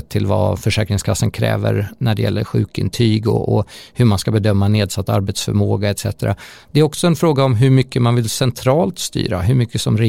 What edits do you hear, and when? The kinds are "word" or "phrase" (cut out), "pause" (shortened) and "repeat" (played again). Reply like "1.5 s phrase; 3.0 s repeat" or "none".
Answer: none